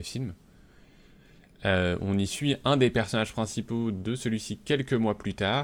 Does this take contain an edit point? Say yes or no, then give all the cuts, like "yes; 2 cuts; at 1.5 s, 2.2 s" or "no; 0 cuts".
no; 0 cuts